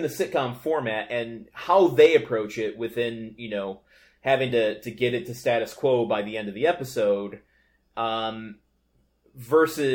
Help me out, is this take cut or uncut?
uncut